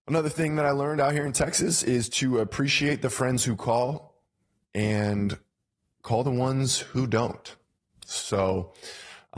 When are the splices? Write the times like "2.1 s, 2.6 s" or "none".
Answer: none